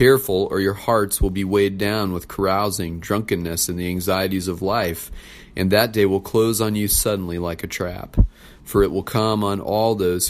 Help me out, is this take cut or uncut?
uncut